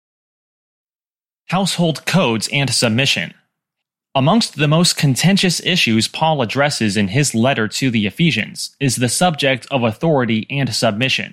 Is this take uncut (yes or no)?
no